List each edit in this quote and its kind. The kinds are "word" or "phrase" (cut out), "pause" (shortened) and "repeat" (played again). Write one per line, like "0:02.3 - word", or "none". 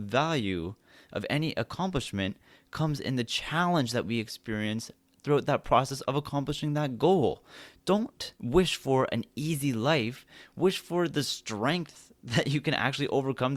0:08.3 - pause